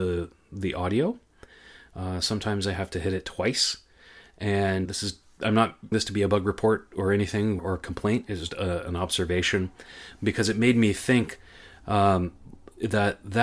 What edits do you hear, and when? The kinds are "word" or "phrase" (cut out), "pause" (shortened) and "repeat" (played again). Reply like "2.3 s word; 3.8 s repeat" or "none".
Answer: 4.9 s word; 5.9 s word; 7.6 s word; 8.5 s word